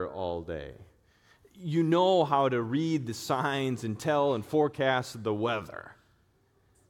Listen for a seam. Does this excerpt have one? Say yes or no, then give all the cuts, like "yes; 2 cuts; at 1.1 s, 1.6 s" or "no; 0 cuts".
no; 0 cuts